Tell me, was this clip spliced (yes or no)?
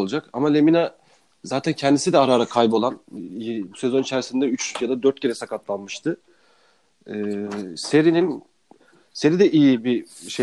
no